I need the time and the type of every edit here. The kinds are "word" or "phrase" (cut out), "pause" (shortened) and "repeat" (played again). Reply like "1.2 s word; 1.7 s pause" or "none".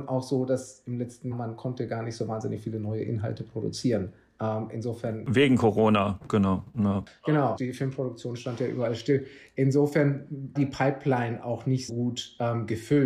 1.3 s word; 7.6 s word; 10.6 s word; 11.9 s word